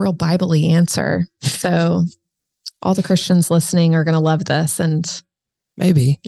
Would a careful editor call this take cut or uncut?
uncut